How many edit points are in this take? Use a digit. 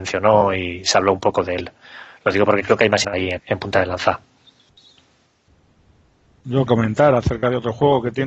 3